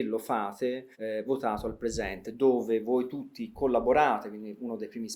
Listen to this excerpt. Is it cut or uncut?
cut